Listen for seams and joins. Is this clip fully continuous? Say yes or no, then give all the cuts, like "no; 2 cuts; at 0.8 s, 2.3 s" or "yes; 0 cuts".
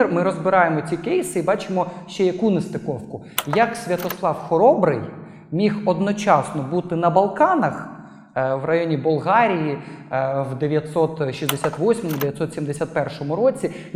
yes; 0 cuts